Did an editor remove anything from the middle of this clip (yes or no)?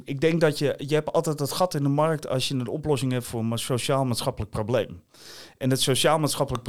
no